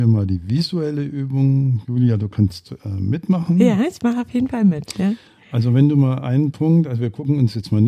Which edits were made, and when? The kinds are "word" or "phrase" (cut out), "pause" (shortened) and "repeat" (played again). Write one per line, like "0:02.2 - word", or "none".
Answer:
none